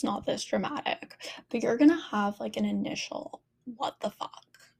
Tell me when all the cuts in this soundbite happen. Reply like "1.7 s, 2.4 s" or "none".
none